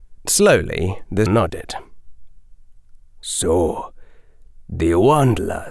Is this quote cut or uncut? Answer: cut